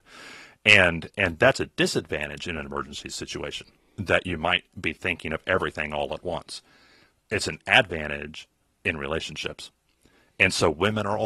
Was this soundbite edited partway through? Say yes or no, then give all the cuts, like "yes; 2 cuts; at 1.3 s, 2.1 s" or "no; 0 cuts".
no; 0 cuts